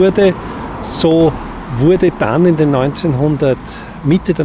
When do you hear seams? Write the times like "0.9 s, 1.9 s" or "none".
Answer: none